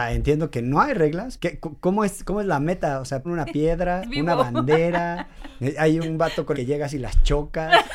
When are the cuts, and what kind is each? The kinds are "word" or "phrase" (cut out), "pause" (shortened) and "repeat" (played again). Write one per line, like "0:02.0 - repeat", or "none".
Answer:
0:01.4 - word
0:03.2 - word
0:04.0 - word
0:06.0 - word
0:06.5 - word